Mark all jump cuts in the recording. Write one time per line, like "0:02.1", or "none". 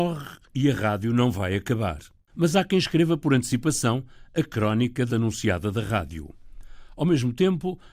0:05.1